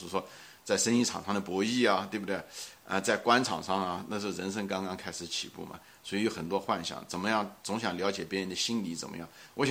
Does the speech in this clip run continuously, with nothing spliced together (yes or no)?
yes